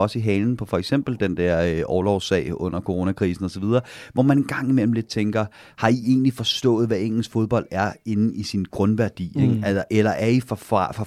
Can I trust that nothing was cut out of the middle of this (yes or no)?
yes